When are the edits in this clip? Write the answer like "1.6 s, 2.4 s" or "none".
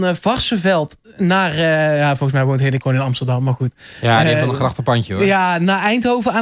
2.8 s